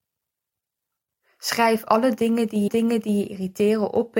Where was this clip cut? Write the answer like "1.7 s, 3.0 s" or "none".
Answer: 2.7 s

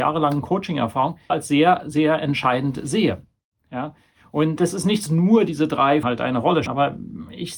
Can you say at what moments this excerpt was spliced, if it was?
1.3 s, 4.6 s, 5.1 s, 6.0 s, 6.7 s

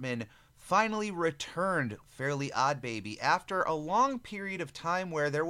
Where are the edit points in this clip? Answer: 2.0 s

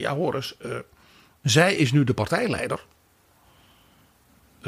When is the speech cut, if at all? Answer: none

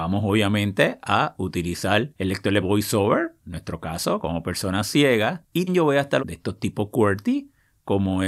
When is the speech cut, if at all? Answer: 2.6 s, 5.7 s, 6.2 s

